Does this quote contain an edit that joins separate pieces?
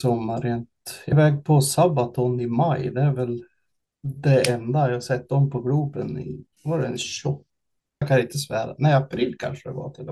yes; 3 cuts; at 1.1 s, 6.5 s, 8.0 s

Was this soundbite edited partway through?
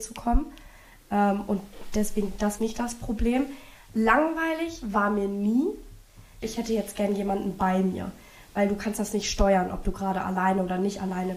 yes; 2 cuts; at 2.6 s, 6.4 s

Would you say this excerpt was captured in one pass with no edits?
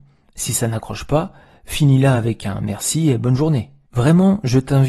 yes; 0 cuts

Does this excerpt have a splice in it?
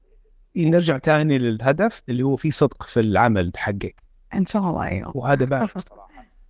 no; 0 cuts

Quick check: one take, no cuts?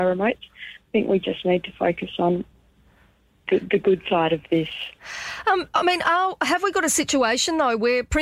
yes; 0 cuts

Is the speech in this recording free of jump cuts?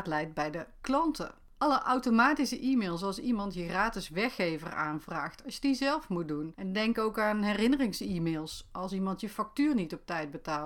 yes; 0 cuts

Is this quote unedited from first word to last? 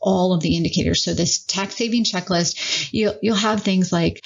yes; 0 cuts

